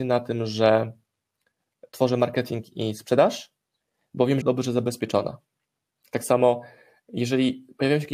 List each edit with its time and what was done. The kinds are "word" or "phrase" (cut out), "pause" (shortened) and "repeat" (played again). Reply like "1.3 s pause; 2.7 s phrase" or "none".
4.4 s phrase